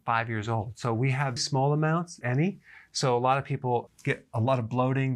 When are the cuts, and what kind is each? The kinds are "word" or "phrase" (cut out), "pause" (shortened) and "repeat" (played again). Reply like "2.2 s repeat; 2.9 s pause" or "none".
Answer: 1.4 s word; 2.2 s word; 3.9 s word